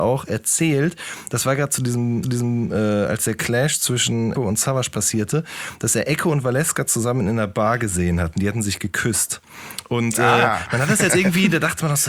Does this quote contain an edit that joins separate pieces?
yes; 3 cuts; at 2.2 s, 4.3 s, 11.1 s

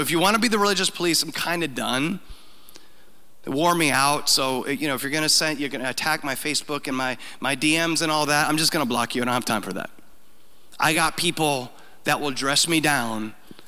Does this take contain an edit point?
no; 0 cuts

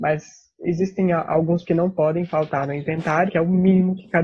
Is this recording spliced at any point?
yes; 2 cuts; at 1.6 s, 3.3 s

